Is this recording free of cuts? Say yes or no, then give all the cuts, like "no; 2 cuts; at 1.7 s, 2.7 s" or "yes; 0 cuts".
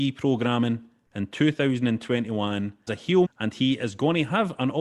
no; 2 cuts; at 2.9 s, 3.2 s